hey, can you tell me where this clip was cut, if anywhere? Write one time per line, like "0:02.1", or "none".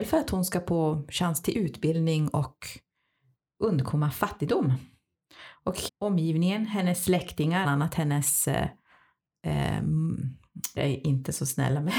0:05.9
0:07.6
0:10.8